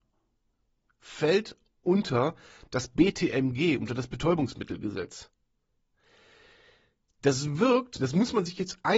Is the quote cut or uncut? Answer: uncut